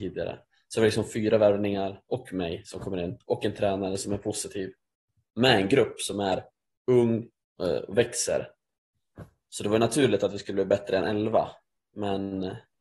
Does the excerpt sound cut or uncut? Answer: uncut